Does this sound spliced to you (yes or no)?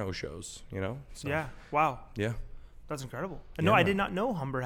yes